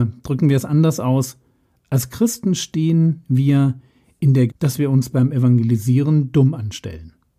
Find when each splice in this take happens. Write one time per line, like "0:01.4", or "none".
0:04.5